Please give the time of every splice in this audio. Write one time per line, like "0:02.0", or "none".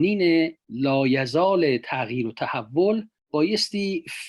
none